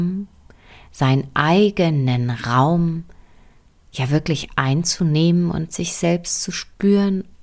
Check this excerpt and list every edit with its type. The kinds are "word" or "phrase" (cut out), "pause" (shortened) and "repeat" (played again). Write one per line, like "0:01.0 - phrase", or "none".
none